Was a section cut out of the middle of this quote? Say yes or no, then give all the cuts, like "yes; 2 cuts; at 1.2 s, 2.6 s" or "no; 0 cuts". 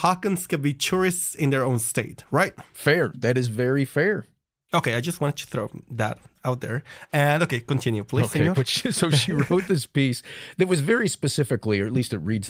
no; 0 cuts